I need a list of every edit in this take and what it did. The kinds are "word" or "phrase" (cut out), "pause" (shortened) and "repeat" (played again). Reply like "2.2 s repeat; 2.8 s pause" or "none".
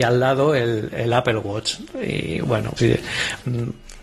0.9 s word; 2.8 s word